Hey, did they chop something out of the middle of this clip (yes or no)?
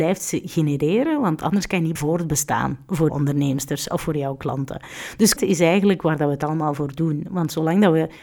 yes